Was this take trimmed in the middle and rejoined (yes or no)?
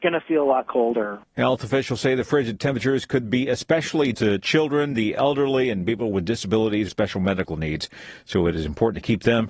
yes